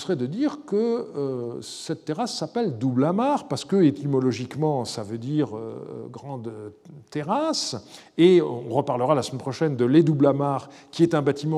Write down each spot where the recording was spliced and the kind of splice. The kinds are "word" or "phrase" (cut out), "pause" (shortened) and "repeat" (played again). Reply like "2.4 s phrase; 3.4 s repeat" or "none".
none